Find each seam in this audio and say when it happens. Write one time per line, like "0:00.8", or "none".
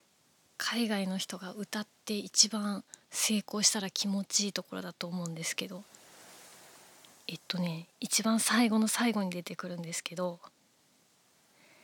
none